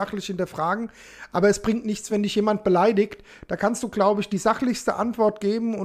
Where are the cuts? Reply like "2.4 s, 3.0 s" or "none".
none

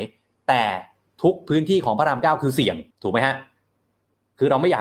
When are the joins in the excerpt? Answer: 2.9 s

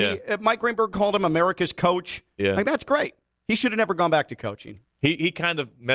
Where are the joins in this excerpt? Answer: none

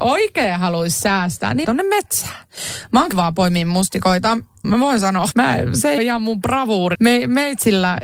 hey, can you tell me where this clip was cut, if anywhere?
1.6 s, 3.1 s, 4.6 s, 5.3 s, 6.0 s, 6.9 s

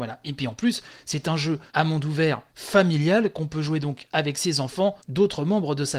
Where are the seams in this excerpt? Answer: 1.7 s, 2.5 s, 5.0 s

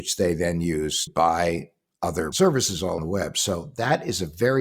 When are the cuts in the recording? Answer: 1.1 s, 2.3 s, 3.0 s

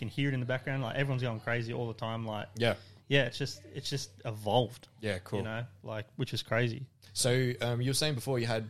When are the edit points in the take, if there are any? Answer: none

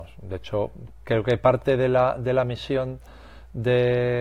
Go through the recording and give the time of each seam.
none

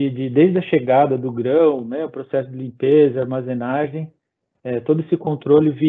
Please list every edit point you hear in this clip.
none

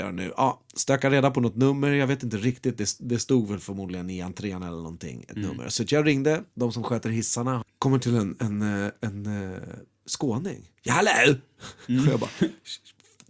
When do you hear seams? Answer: 6.5 s, 10.8 s

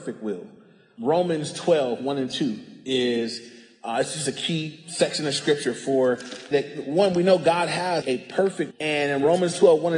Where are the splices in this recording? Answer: 6.5 s, 8.0 s, 8.7 s

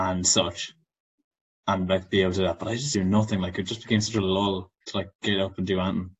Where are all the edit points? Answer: 2.9 s, 4.7 s

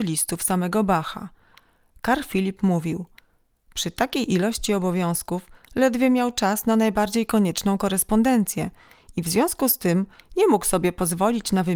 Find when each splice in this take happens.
none

